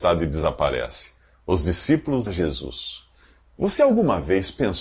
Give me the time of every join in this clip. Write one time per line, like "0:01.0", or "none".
0:02.3